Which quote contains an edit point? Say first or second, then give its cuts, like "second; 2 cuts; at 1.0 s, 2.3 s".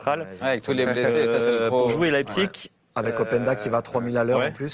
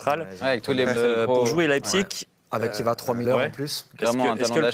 second; 3 cuts; at 1.0 s, 2.7 s, 3.2 s